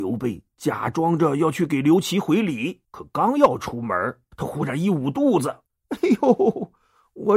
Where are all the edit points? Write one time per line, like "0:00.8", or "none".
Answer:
0:02.8
0:04.3
0:05.7

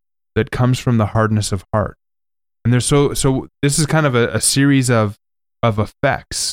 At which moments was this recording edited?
0:03.5

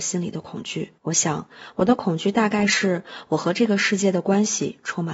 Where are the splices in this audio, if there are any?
0:01.0

